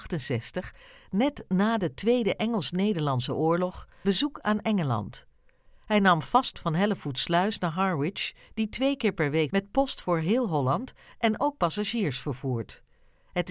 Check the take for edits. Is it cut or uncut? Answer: cut